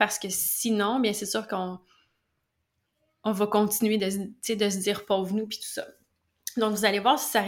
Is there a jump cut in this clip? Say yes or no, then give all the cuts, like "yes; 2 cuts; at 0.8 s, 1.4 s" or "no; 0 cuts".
no; 0 cuts